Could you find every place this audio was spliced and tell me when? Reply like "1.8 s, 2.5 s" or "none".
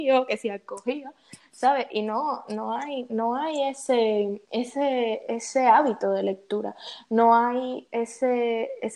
4.4 s